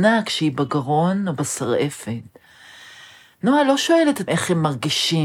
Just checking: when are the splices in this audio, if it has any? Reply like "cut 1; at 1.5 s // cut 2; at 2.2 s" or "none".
cut 1; at 4.3 s